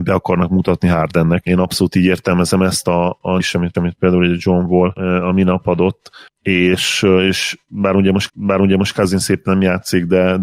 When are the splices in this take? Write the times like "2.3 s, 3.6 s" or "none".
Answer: 3.4 s, 3.7 s, 6.3 s, 8.3 s